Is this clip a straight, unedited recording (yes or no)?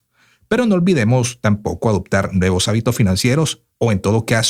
yes